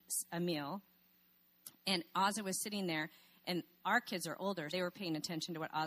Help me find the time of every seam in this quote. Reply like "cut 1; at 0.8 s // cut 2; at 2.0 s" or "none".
cut 1; at 4.7 s